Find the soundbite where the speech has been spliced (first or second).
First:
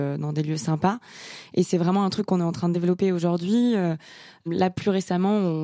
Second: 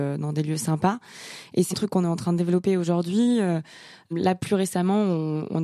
second